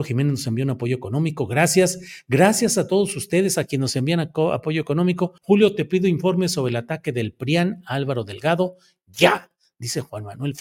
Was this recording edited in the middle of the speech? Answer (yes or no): yes